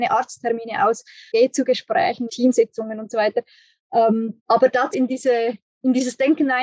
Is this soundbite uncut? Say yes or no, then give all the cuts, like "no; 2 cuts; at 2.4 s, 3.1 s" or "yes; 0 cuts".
no; 4 cuts; at 1.3 s, 2.3 s, 4.4 s, 4.9 s